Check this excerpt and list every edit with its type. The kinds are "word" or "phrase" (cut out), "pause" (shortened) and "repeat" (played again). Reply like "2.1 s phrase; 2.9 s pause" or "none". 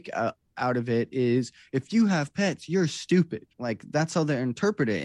3.5 s pause